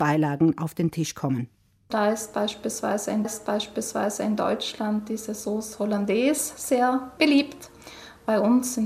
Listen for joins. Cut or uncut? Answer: cut